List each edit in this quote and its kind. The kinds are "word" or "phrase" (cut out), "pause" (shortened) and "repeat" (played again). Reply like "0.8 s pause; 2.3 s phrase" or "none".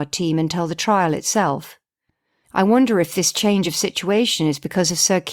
none